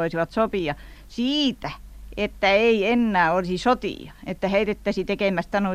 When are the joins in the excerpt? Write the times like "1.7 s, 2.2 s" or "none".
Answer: none